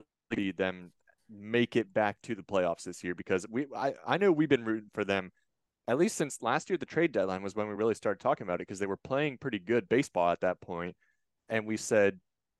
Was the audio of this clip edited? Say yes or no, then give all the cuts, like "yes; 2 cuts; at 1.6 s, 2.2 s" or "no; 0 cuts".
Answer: no; 0 cuts